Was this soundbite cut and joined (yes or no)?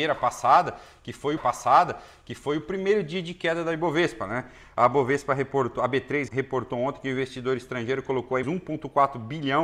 yes